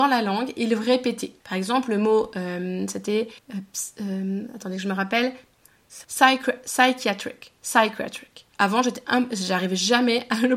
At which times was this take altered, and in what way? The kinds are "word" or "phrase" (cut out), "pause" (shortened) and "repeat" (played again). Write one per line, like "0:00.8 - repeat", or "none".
0:01.4 - pause
0:03.4 - pause
0:06.0 - pause
0:08.5 - pause